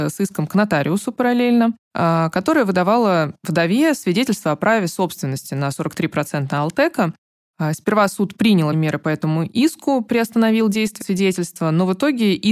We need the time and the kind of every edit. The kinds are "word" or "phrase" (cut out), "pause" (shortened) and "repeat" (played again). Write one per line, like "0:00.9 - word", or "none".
0:01.8 - pause
0:08.7 - word
0:11.0 - word

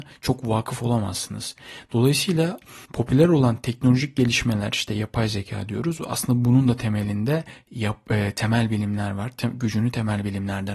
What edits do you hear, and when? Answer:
0:02.8 - pause

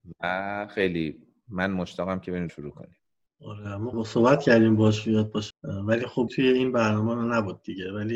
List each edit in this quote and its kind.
0:02.5 - word
0:03.9 - word
0:05.5 - word
0:06.3 - word

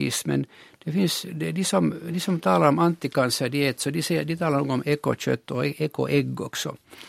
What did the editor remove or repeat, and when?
none

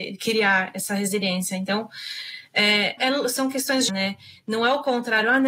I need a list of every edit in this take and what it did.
0:03.0 - word
0:03.9 - word

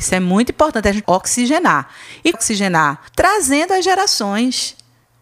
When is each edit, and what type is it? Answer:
0:01.0 - word
0:02.3 - phrase
0:03.1 - pause

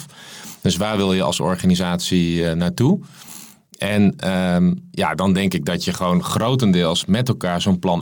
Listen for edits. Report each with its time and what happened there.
none

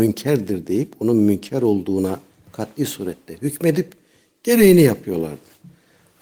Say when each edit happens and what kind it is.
none

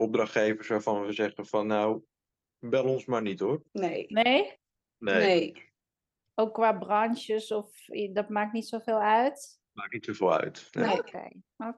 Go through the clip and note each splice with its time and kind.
0:03.7 - pause

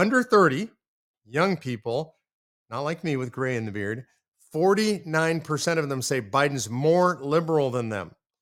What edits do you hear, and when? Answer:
none

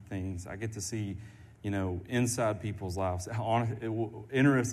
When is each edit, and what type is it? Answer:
none

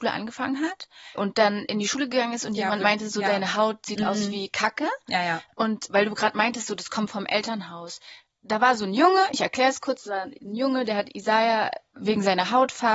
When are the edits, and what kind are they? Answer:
0:01.2 - word
0:05.9 - word

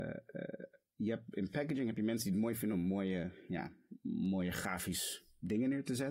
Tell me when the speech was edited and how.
none

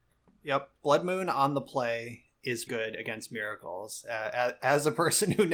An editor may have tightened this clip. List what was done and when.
0:02.7 - word

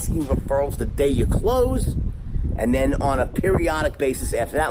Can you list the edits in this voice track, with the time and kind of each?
none

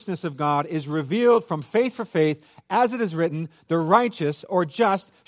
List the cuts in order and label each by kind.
none

